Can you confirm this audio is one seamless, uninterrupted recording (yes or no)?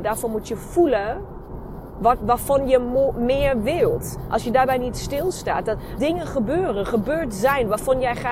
no